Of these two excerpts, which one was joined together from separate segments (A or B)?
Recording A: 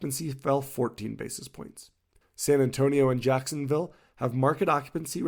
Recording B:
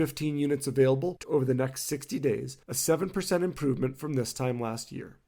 B